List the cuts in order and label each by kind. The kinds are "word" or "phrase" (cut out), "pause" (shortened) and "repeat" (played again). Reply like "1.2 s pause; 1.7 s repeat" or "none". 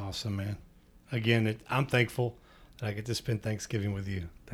none